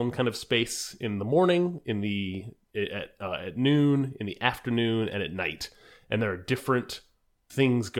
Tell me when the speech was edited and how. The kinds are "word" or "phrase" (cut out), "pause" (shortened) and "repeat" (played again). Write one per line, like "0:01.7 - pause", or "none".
none